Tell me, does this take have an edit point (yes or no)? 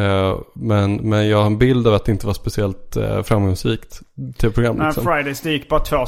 no